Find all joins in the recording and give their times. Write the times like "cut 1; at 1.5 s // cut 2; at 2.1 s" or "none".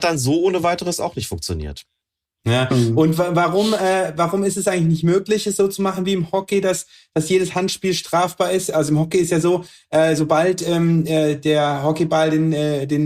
none

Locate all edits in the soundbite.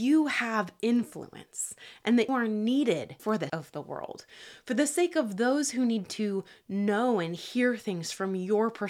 cut 1; at 2.3 s // cut 2; at 3.5 s

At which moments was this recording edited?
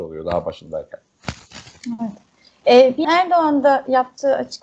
cut 1; at 3.0 s

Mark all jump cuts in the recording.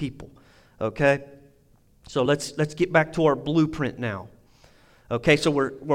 none

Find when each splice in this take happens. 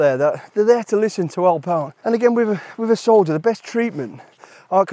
cut 1; at 2.0 s

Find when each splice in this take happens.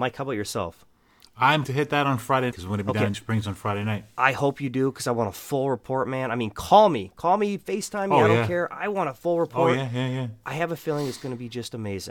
cut 1; at 1.6 s // cut 2; at 2.5 s // cut 3; at 3.1 s

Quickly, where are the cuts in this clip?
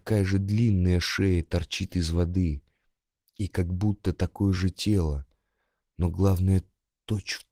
none

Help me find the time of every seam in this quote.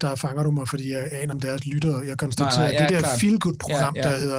cut 1; at 1.3 s

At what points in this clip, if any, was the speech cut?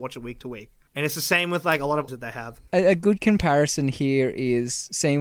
cut 1; at 2.1 s // cut 2; at 2.7 s

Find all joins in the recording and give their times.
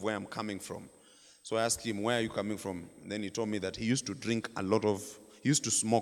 none

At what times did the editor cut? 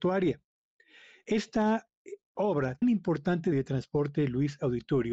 cut 1; at 2.8 s // cut 2; at 3.5 s

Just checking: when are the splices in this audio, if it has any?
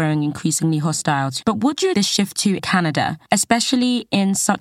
cut 1; at 1.4 s // cut 2; at 1.9 s // cut 3; at 2.6 s

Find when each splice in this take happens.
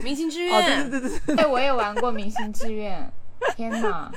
cut 1; at 1.4 s

